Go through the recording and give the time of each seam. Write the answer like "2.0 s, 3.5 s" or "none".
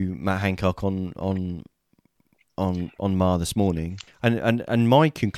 4.1 s